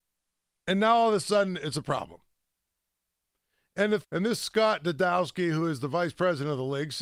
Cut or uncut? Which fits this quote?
cut